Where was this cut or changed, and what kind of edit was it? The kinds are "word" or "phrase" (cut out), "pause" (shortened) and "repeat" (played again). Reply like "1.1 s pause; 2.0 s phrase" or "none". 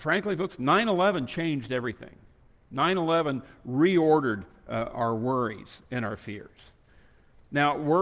none